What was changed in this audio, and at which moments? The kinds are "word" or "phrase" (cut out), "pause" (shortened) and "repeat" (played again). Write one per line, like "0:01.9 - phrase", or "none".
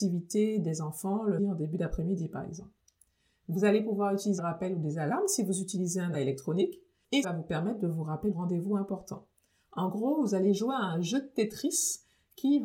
0:01.4 - word
0:04.4 - word
0:06.1 - word
0:07.2 - word
0:08.3 - word